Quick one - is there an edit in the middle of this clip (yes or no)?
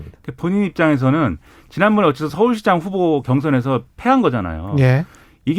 no